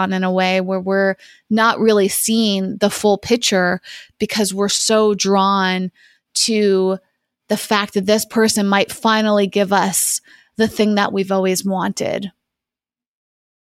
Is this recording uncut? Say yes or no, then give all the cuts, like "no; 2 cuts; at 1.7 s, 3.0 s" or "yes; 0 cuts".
yes; 0 cuts